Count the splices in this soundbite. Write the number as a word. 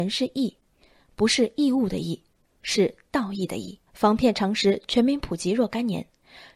one